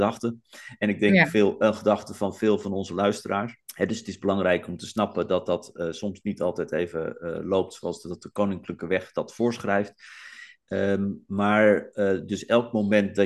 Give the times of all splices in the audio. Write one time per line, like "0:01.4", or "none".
0:03.7